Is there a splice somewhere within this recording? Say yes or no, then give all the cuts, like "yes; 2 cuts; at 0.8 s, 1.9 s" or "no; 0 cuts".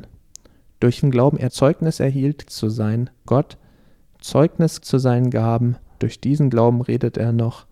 yes; 6 cuts; at 1.0 s, 1.5 s, 2.5 s, 3.3 s, 4.8 s, 6.0 s